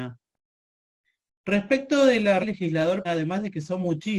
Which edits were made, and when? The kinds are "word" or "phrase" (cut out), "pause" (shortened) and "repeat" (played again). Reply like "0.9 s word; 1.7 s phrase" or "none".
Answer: 2.4 s word; 3.0 s word